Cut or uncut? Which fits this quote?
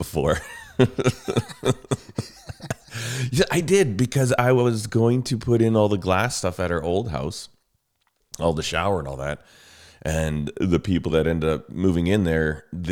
uncut